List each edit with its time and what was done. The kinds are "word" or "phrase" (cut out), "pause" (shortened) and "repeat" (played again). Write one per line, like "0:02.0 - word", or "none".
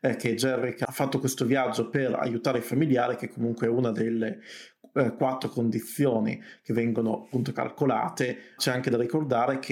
0:08.6 - word